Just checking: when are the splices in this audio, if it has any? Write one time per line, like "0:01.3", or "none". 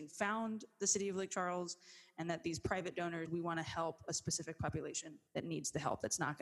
0:03.3
0:05.3